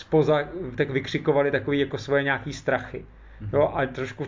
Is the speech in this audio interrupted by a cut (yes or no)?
no